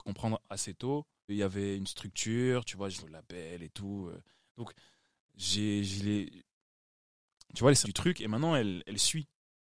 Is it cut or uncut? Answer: cut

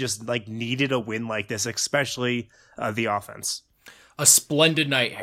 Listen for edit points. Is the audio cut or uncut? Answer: uncut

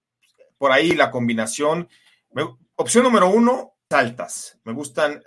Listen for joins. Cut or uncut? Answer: cut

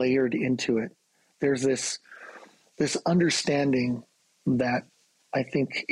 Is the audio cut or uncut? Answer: uncut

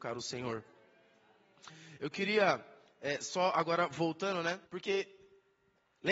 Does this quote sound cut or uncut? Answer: cut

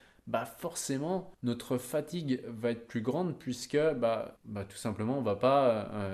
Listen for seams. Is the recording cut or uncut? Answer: cut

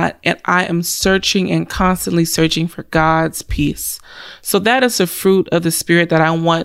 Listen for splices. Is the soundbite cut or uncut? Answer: uncut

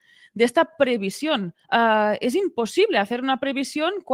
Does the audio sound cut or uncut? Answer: cut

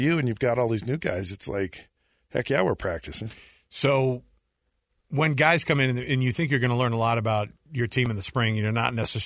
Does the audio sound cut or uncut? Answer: uncut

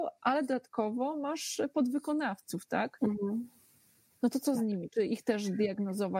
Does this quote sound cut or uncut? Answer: uncut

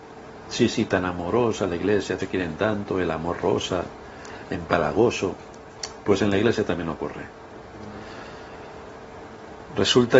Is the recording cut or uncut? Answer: cut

